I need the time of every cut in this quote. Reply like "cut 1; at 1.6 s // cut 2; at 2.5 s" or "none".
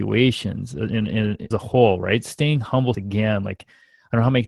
cut 1; at 1.5 s // cut 2; at 2.9 s